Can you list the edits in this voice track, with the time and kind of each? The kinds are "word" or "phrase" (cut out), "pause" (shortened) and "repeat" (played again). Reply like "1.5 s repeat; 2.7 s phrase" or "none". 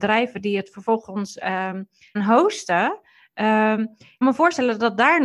2.2 s word; 4.2 s word